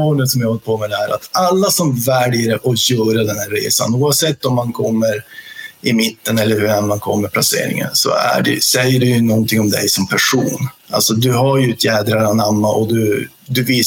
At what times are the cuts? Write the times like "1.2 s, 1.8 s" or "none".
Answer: none